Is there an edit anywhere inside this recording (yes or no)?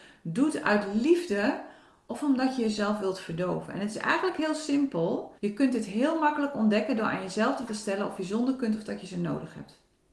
yes